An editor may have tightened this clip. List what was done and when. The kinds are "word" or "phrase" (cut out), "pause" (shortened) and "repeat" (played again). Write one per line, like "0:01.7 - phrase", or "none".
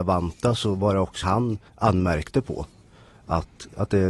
0:01.2 - word
0:01.7 - pause

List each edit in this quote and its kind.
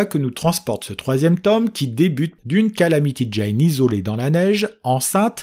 0:02.4 - phrase

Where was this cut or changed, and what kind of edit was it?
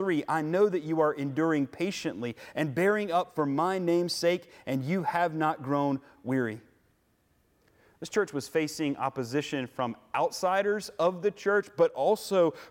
none

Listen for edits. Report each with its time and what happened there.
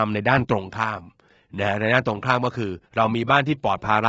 0:02.9 - pause

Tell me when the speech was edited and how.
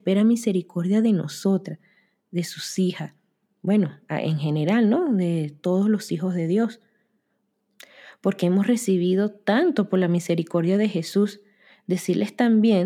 none

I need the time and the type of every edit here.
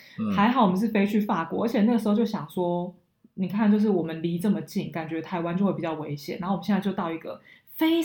none

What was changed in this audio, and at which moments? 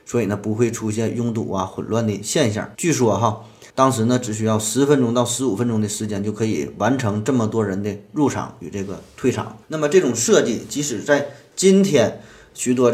0:02.7 - pause
0:03.7 - pause
0:09.6 - pause

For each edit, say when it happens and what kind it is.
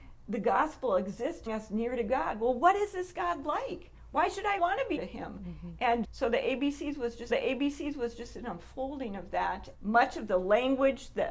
0:01.5 - word
0:04.6 - word
0:05.0 - word
0:06.0 - word
0:07.3 - repeat
0:09.7 - word

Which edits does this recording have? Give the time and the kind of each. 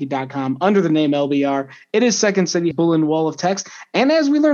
0:02.7 - word

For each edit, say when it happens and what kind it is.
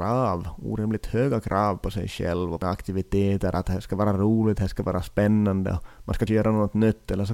0:02.6 - word
0:06.3 - word

